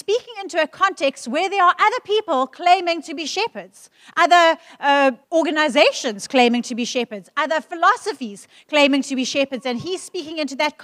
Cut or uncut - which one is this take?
cut